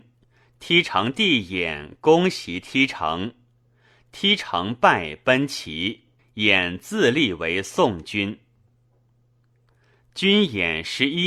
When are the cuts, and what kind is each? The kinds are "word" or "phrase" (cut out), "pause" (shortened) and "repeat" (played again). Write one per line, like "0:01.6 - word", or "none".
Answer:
0:06.2 - pause